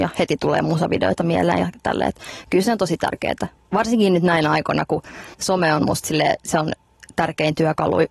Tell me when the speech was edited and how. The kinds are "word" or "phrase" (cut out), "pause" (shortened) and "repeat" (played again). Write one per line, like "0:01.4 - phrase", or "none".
0:05.3 - pause